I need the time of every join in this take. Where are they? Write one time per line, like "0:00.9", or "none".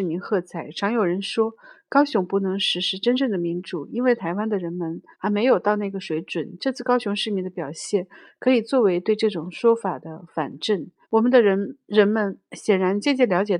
0:05.1
0:11.0